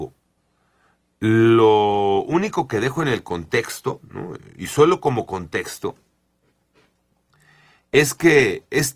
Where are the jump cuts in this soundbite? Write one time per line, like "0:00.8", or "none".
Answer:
none